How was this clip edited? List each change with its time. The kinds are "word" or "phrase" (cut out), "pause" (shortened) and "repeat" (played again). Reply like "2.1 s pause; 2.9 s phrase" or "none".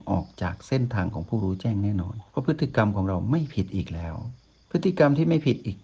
2.3 s pause; 4.4 s pause